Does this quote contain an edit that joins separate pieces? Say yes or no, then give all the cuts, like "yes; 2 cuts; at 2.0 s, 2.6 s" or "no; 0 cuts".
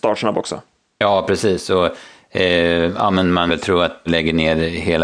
yes; 2 cuts; at 3.5 s, 4.1 s